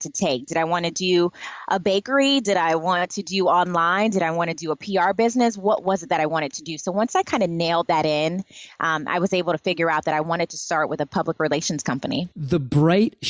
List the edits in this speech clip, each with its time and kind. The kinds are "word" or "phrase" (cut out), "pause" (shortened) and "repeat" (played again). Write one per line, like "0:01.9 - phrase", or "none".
0:12.3 - pause